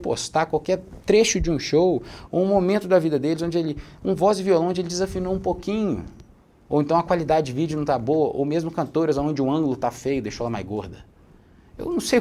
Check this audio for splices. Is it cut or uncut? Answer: uncut